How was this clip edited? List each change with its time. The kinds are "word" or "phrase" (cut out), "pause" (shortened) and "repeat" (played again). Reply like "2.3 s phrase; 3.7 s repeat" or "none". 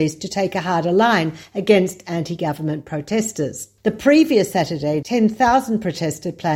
3.8 s pause; 5.0 s word